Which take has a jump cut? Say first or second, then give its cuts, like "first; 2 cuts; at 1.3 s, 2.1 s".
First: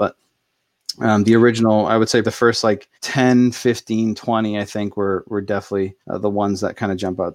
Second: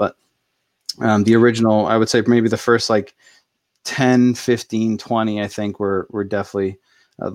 first; 3 cuts; at 2.2 s, 2.9 s, 6.0 s